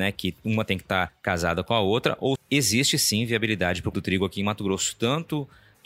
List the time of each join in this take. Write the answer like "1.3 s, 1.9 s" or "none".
1.1 s, 2.3 s, 3.9 s